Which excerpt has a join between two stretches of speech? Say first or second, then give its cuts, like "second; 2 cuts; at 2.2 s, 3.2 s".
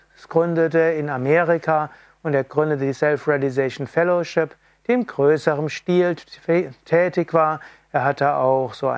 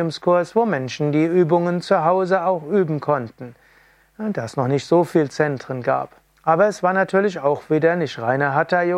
second; 1 cut; at 6.2 s